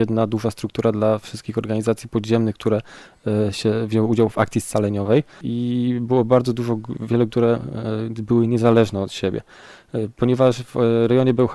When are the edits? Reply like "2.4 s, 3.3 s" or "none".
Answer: 7.3 s